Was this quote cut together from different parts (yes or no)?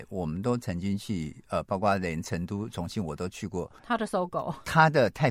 yes